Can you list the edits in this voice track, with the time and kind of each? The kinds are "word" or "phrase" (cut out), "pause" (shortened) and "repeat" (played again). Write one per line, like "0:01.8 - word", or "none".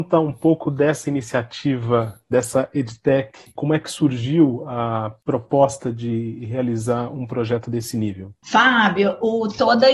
none